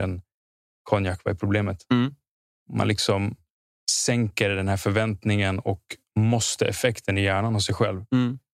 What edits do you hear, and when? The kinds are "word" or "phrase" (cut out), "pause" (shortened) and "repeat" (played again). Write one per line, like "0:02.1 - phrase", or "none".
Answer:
none